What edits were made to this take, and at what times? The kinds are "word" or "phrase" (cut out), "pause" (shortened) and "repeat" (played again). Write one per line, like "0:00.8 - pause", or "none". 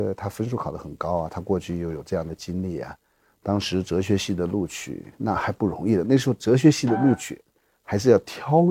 none